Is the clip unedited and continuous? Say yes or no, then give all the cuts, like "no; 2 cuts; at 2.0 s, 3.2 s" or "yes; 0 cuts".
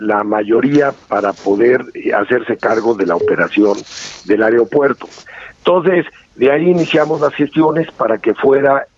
yes; 0 cuts